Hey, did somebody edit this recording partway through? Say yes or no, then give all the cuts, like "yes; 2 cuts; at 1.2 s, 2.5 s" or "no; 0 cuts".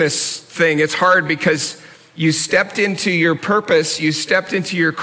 no; 0 cuts